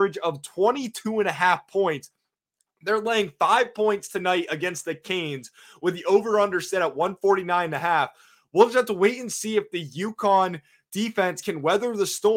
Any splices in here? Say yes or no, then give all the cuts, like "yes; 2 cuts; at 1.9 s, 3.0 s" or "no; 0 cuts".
no; 0 cuts